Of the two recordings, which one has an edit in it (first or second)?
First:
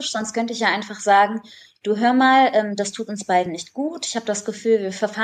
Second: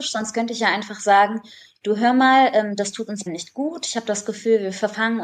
second